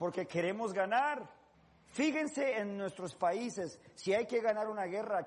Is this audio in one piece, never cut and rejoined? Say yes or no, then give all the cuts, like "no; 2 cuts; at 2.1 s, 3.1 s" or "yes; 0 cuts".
no; 1 cut; at 1.5 s